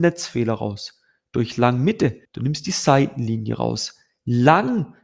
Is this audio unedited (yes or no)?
no